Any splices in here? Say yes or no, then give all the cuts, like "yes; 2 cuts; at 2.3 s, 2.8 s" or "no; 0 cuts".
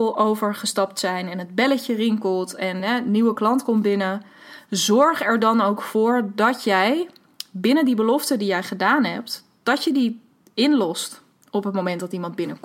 no; 0 cuts